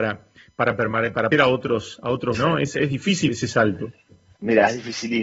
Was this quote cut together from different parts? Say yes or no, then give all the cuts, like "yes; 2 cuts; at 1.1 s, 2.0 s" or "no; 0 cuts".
yes; 3 cuts; at 1.3 s, 2.3 s, 3.3 s